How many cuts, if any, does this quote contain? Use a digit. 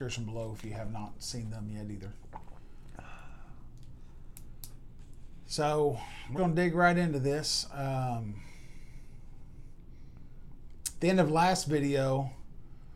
1